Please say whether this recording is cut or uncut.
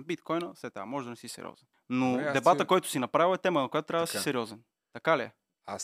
uncut